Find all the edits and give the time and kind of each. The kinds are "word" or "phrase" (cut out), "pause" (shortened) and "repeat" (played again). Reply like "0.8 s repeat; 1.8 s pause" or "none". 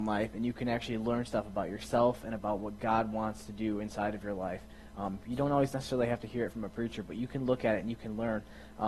none